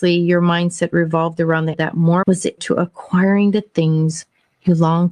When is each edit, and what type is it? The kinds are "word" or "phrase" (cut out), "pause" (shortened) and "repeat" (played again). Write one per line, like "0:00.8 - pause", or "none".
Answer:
0:01.7 - word
0:02.2 - word
0:02.6 - word